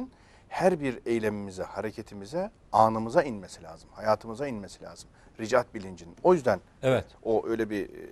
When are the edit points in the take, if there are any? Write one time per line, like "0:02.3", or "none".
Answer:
none